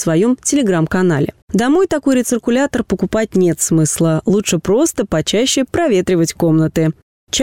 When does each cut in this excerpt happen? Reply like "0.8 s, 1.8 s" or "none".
1.4 s